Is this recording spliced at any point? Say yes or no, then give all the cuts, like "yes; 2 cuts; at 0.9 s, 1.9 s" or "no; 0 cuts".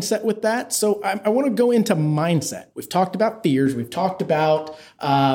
yes; 1 cut; at 2.7 s